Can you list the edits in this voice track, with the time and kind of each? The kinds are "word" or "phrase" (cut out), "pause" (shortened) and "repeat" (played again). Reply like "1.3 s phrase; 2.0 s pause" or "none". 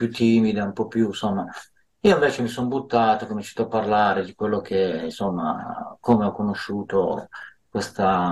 none